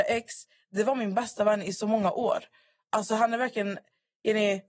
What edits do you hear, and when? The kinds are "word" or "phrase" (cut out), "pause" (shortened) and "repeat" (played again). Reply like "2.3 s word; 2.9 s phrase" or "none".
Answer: none